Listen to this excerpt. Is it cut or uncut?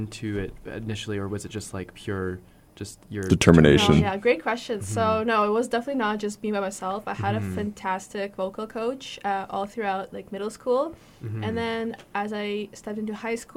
uncut